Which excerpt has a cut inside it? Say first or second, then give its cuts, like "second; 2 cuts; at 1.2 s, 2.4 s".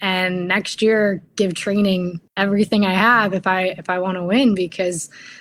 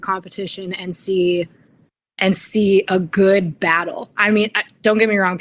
first; 2 cuts; at 1.3 s, 2.3 s